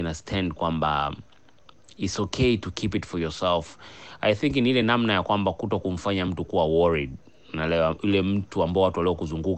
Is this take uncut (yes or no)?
yes